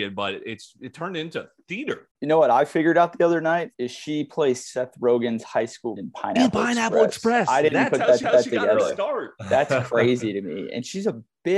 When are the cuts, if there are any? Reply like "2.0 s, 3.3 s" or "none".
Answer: 2.1 s, 3.7 s, 6.0 s, 8.2 s, 9.4 s